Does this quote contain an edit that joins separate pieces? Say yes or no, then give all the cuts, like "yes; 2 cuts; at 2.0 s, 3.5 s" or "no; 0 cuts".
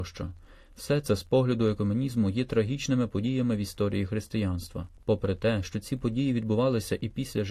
no; 0 cuts